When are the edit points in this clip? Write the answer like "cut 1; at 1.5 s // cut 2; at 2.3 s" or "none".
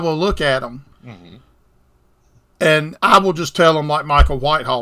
cut 1; at 0.9 s // cut 2; at 3.0 s